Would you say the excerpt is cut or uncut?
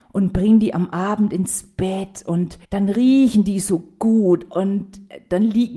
cut